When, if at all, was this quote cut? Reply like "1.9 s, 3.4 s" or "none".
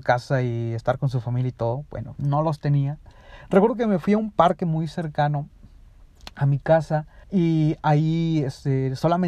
7.2 s